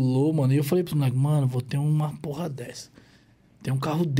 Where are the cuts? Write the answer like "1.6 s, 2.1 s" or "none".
none